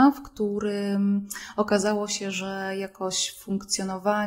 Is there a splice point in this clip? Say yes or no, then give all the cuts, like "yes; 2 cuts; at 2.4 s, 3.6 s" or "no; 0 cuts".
no; 0 cuts